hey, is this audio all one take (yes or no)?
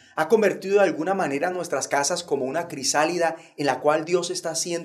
yes